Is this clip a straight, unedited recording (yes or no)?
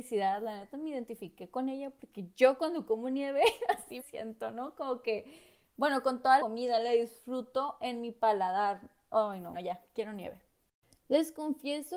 no